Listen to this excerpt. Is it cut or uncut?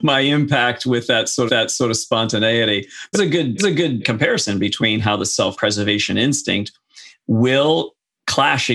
cut